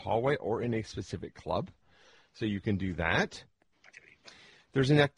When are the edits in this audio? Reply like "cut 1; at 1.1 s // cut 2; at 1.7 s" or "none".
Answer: none